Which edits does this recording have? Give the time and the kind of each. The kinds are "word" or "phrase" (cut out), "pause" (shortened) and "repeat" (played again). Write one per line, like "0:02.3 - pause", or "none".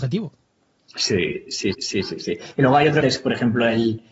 0:01.7 - repeat
0:03.0 - phrase

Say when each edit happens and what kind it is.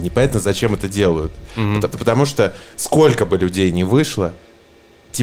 0:01.9 - word
0:02.7 - word

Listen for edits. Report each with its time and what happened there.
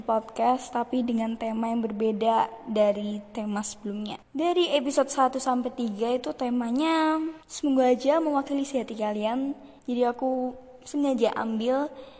0:04.2 - pause
0:07.4 - pause
0:09.8 - pause

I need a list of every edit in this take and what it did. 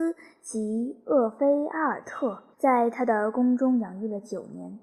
0:02.5 - pause

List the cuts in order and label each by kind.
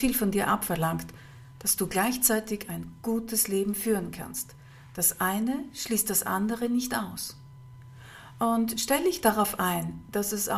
none

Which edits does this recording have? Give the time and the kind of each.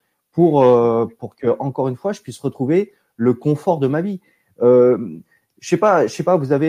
none

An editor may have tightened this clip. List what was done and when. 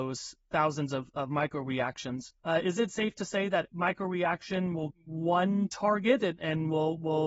0:02.4 - pause
0:03.7 - word
0:04.9 - word

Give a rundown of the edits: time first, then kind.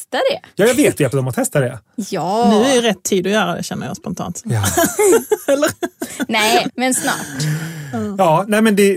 0:01.1 - word
0:06.7 - word

